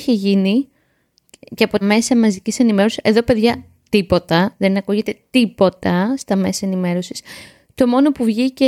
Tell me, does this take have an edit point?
yes; 1 cut; at 1.8 s

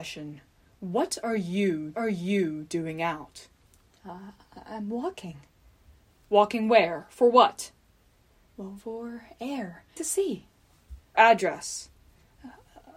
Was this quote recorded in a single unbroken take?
no; 5 cuts; at 1.9 s, 3.6 s, 8.8 s, 10.0 s, 11.1 s

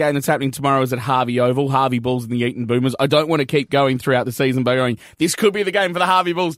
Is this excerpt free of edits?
yes; 0 cuts

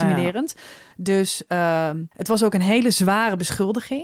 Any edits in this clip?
yes; 1 cut; at 2.1 s

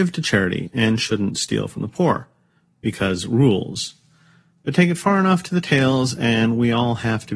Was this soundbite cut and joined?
no; 0 cuts

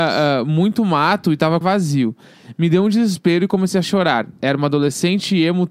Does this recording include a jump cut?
yes; 1 cut; at 1.6 s

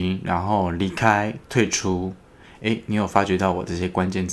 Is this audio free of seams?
yes; 0 cuts

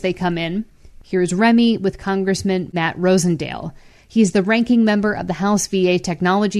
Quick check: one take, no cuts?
yes; 0 cuts

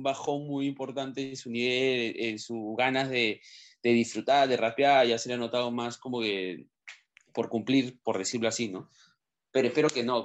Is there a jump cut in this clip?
no; 0 cuts

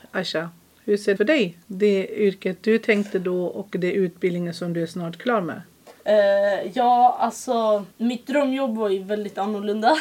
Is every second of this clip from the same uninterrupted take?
no; 4 cuts; at 1.2 s, 1.6 s, 6.0 s, 7.9 s

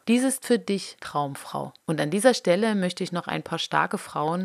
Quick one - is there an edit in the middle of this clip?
yes; 1 cut; at 1.8 s

